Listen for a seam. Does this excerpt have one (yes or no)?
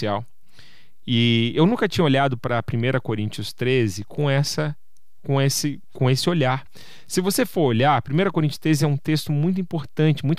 no